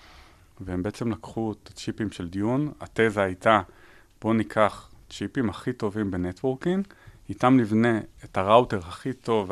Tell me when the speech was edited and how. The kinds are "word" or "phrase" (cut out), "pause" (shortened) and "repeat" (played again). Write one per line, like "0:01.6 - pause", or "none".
none